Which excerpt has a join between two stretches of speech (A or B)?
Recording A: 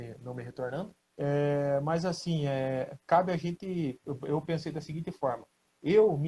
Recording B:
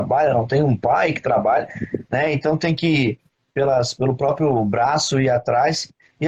A